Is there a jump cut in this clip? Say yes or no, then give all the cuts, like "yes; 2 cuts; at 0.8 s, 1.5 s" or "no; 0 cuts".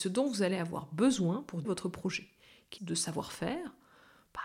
yes; 2 cuts; at 1.6 s, 2.8 s